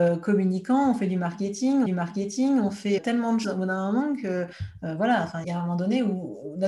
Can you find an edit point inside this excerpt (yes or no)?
yes